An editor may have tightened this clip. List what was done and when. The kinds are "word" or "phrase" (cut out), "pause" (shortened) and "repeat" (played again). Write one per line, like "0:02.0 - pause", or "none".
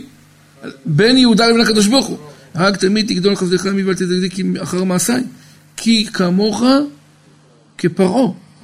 none